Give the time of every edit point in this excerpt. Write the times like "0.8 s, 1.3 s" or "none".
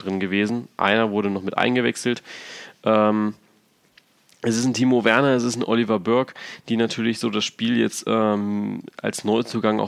none